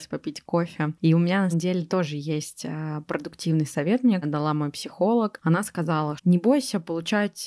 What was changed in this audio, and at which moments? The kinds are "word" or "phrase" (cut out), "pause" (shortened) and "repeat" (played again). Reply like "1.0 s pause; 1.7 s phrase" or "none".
1.5 s word; 4.2 s phrase; 6.2 s word